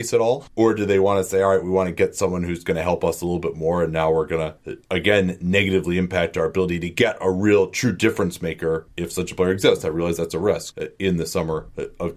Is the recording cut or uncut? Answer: uncut